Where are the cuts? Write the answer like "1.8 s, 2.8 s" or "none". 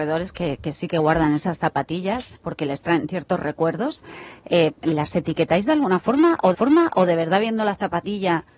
2.4 s, 6.5 s